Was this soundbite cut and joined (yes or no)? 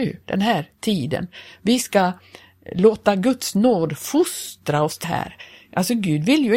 yes